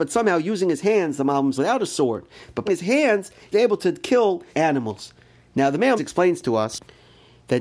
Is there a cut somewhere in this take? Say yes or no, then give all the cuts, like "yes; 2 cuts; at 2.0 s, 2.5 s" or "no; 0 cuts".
yes; 5 cuts; at 1.5 s, 2.7 s, 3.5 s, 4.5 s, 6.0 s